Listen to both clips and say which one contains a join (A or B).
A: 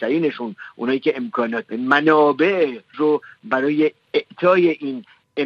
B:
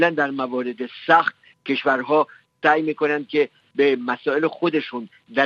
A